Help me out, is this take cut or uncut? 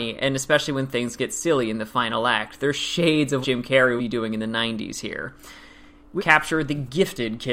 cut